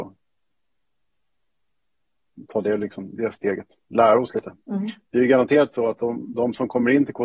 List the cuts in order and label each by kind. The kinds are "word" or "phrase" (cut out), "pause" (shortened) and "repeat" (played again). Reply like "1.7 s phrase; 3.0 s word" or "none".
4.6 s pause